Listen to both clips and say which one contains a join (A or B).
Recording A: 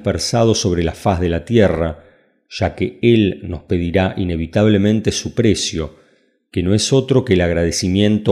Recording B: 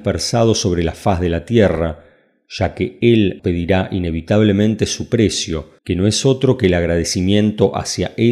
B